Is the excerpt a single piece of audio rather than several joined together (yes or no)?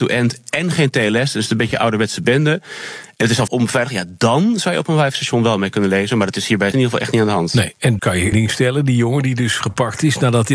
no